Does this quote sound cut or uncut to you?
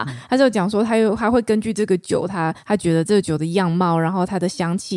cut